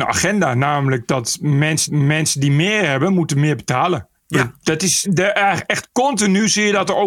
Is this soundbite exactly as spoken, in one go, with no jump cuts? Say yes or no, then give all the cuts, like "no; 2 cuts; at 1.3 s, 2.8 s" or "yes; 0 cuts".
no; 3 cuts; at 1.9 s, 4.2 s, 5.0 s